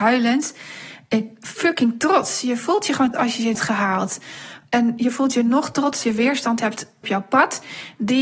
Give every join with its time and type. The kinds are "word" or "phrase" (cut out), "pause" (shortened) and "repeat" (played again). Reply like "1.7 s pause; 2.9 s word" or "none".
3.1 s word; 3.5 s phrase; 6.0 s word; 7.0 s phrase